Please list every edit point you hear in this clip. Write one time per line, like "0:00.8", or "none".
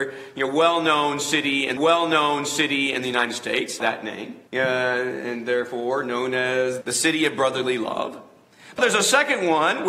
0:01.8
0:03.8
0:04.5
0:06.8
0:08.8